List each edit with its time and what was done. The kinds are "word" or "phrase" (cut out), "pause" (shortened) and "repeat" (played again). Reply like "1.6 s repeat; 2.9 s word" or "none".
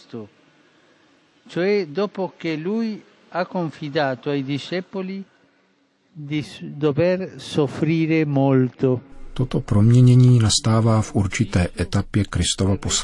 none